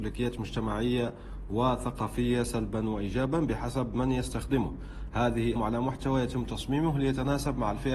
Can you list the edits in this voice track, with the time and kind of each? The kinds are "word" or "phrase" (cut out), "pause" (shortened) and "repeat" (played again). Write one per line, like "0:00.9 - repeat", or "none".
0:05.6 - phrase